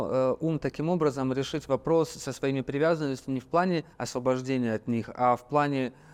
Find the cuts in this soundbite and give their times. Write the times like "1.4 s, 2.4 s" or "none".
3.9 s

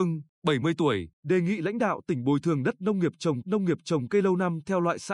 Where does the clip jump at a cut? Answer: 1.1 s, 3.4 s

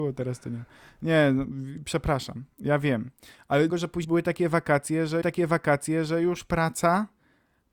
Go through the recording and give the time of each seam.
3.7 s, 4.0 s, 5.2 s

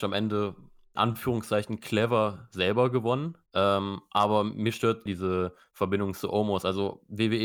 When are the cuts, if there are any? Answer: 1.0 s, 3.5 s, 5.1 s

